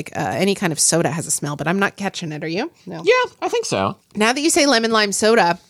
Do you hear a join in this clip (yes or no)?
no